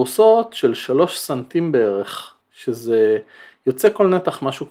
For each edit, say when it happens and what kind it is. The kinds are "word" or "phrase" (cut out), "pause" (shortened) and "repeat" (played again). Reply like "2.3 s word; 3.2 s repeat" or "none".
2.4 s pause